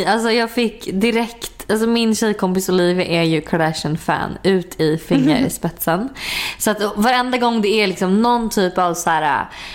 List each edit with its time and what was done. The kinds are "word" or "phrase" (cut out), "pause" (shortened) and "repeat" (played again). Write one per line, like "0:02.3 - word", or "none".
none